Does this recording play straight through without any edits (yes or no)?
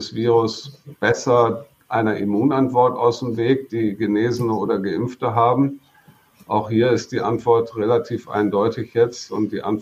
yes